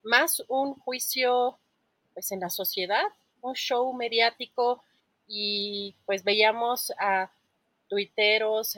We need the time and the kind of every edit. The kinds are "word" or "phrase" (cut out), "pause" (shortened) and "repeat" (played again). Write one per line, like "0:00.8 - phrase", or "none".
none